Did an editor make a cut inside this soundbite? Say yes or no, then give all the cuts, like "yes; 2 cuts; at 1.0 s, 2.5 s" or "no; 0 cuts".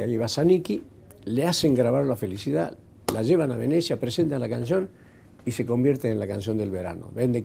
no; 0 cuts